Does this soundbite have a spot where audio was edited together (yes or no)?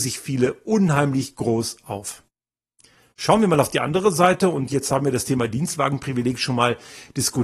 no